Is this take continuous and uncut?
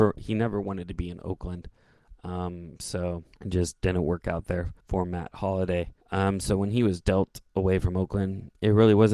no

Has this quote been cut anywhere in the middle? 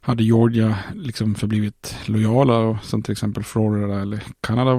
no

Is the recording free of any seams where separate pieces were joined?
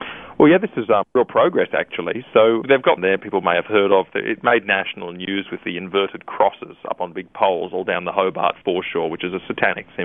no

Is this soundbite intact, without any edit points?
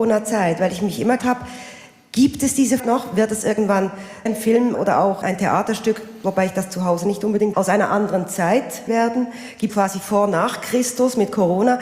no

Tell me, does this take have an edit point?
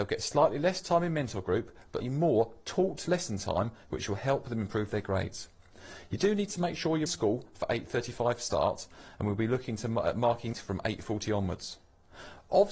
yes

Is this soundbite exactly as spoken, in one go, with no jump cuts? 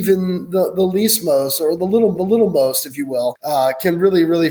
no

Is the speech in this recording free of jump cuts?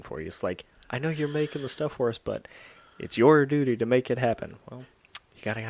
yes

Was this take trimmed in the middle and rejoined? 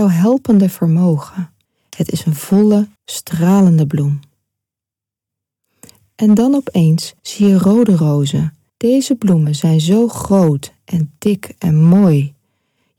yes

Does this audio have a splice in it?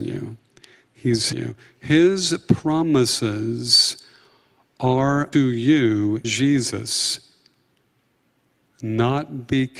yes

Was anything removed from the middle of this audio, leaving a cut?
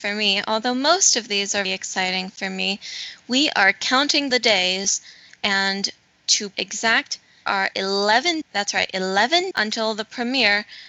yes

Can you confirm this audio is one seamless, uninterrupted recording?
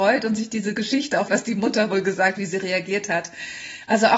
no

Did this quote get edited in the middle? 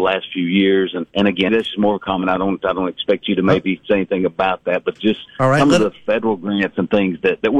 yes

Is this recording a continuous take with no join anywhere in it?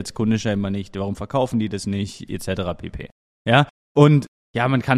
yes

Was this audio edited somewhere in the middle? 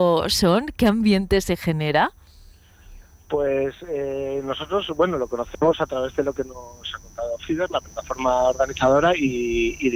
no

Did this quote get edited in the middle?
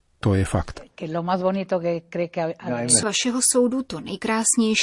yes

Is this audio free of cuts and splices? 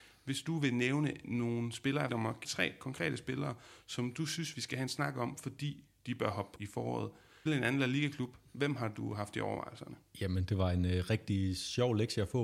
no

